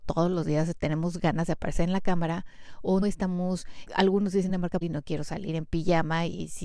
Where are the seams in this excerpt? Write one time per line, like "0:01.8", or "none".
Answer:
0:03.0
0:03.9
0:04.5
0:04.8